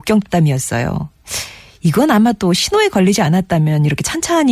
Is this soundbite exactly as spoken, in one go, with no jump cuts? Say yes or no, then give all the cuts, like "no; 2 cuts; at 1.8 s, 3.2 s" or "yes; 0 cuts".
yes; 0 cuts